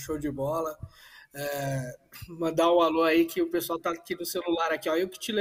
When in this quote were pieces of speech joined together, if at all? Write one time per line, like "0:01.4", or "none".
none